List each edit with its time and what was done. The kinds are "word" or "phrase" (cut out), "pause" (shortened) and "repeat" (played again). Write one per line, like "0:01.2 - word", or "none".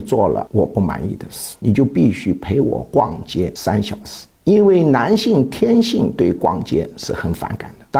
none